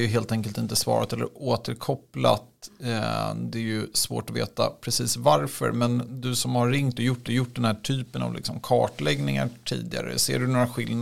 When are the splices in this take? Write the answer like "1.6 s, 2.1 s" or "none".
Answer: 7.3 s